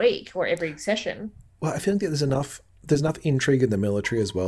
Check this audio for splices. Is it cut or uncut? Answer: uncut